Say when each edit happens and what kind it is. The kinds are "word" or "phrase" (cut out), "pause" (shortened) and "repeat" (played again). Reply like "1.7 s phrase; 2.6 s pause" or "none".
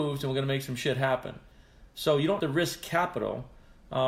2.4 s word